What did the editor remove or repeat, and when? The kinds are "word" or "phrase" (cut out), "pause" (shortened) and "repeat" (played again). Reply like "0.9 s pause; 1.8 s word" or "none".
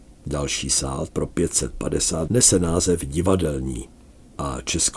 1.1 s word; 2.3 s word